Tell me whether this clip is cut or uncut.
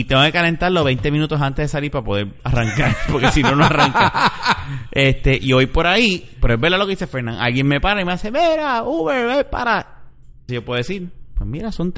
cut